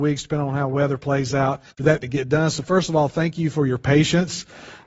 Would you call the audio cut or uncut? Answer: cut